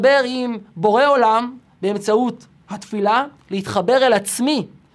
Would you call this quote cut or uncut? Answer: uncut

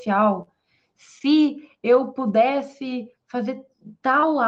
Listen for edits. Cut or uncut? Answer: uncut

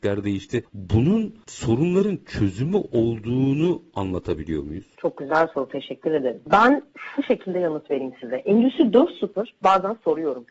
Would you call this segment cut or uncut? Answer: uncut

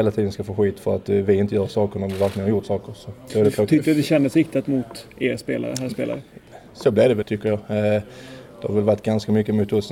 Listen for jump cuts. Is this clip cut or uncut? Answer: cut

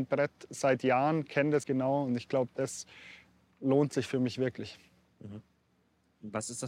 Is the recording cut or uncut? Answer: cut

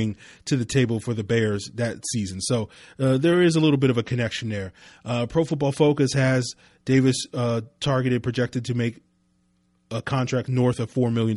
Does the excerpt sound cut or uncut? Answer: uncut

